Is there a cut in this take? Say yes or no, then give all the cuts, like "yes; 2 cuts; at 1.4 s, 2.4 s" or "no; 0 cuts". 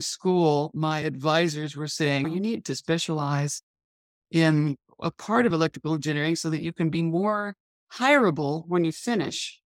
no; 0 cuts